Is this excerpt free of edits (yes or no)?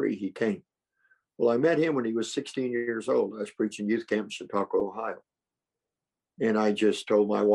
yes